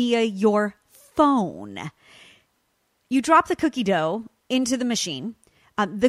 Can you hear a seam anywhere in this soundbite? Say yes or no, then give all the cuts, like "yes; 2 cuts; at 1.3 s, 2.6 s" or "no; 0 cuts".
no; 0 cuts